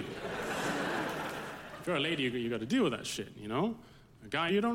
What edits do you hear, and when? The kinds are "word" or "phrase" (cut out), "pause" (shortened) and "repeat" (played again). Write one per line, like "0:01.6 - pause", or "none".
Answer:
none

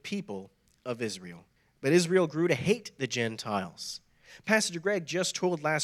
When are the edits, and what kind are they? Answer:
0:01.6 - pause

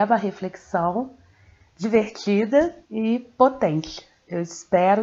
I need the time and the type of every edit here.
0:02.8 - pause

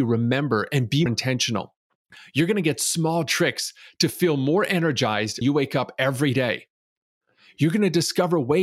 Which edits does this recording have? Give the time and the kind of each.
0:01.1 - word
0:05.4 - word

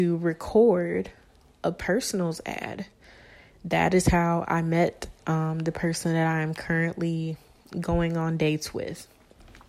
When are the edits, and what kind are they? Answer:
none

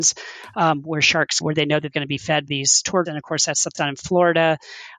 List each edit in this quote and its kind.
0:01.4 - word
0:01.9 - word
0:02.5 - word
0:03.1 - word
0:03.8 - word

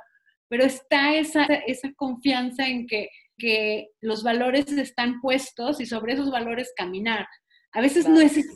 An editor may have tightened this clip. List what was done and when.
0:01.5 - word
0:03.4 - word

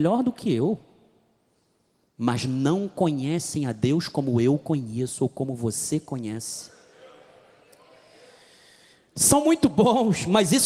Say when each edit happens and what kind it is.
none

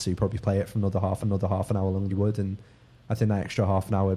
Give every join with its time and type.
0:01.2 - repeat
0:02.1 - phrase

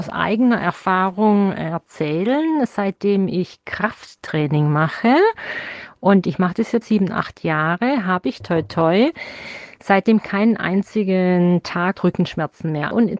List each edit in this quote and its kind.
0:06.8 - word
0:08.4 - word

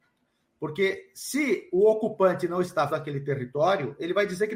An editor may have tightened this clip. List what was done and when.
0:02.9 - phrase

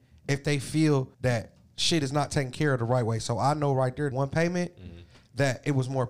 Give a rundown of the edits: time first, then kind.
0:01.1 - pause
0:04.1 - phrase

